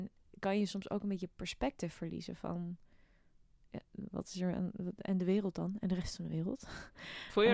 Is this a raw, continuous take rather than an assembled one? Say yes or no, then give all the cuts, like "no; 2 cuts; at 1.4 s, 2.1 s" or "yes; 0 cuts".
yes; 0 cuts